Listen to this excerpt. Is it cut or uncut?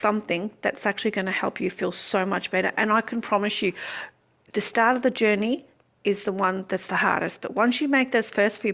uncut